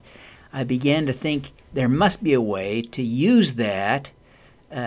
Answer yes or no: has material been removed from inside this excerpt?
no